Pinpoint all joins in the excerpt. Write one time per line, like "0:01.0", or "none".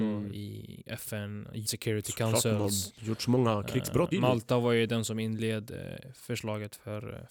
0:01.7
0:04.1